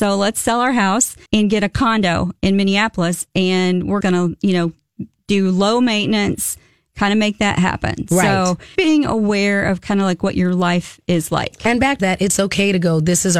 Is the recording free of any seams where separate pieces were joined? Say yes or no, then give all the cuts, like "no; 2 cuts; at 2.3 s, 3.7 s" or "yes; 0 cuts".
no; 4 cuts; at 1.3 s, 4.0 s, 8.7 s, 12.0 s